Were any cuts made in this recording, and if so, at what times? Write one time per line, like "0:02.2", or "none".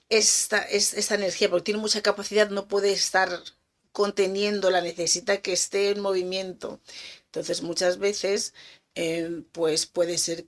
none